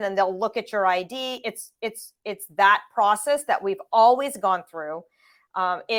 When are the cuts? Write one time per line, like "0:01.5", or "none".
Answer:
none